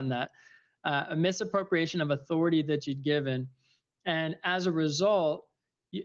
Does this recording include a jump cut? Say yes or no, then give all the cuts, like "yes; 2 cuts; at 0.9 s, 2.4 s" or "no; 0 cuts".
no; 0 cuts